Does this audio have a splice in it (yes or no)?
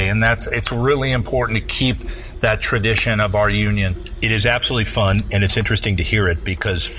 no